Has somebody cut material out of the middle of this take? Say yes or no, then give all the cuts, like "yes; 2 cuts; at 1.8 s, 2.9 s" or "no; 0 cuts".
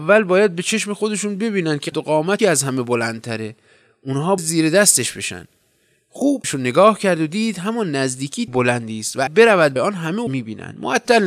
yes; 8 cuts; at 1.9 s, 2.4 s, 4.4 s, 6.4 s, 8.5 s, 9.3 s, 9.8 s, 10.3 s